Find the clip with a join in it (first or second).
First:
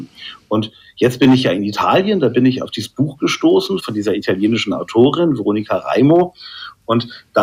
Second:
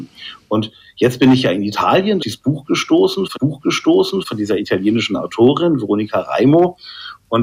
second